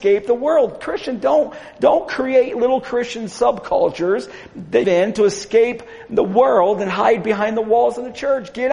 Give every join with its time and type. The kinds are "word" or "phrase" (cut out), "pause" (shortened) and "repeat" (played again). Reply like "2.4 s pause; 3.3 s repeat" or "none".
4.8 s phrase